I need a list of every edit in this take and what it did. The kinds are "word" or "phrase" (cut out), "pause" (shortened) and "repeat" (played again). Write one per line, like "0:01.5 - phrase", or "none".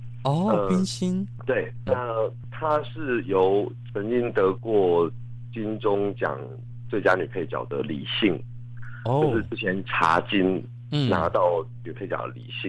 0:01.9 - word